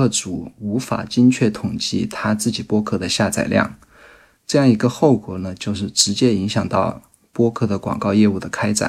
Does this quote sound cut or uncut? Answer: uncut